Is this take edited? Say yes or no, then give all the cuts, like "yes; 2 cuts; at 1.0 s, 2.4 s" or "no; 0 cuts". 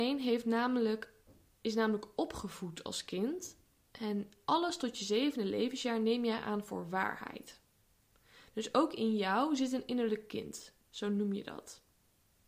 no; 0 cuts